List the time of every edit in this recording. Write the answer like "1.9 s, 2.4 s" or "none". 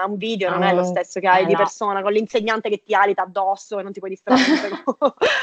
none